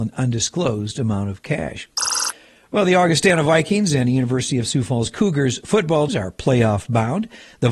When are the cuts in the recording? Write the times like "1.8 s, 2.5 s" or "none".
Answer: 6.1 s